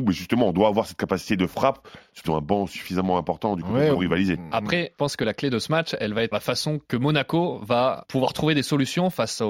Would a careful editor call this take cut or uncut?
cut